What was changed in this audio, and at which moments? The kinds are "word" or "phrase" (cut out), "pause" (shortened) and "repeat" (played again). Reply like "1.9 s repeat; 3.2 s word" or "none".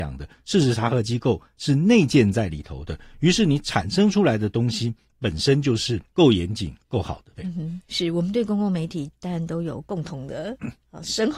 6.1 s pause; 7.3 s pause